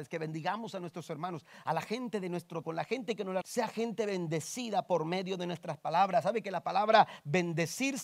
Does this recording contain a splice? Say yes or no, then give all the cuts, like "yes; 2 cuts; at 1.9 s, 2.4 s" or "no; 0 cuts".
yes; 2 cuts; at 2.6 s, 3.4 s